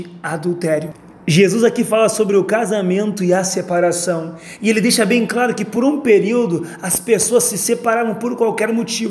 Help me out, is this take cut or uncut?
uncut